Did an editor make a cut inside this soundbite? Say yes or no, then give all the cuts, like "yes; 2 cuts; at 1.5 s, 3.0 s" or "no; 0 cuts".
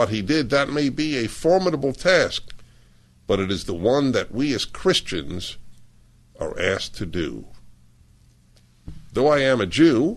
no; 0 cuts